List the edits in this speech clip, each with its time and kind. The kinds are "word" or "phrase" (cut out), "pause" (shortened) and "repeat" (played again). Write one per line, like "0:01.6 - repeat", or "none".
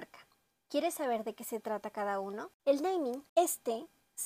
none